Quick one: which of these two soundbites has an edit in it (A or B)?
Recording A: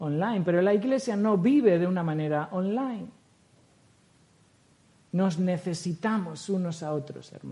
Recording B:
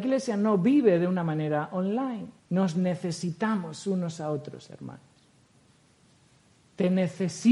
B